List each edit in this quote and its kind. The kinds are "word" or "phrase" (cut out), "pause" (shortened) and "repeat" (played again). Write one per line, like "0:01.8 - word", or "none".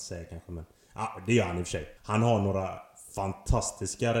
0:02.0 - pause